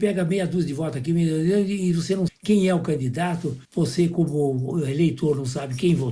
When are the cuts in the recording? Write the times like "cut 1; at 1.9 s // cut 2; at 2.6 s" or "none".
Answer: cut 1; at 2.3 s // cut 2; at 3.6 s